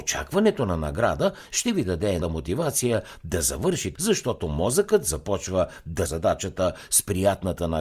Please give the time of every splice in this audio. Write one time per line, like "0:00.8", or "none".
0:02.2
0:04.0
0:06.1